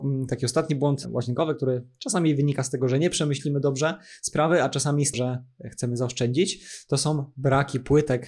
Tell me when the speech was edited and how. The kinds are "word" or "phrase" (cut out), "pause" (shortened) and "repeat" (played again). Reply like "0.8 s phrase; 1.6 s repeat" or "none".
5.1 s word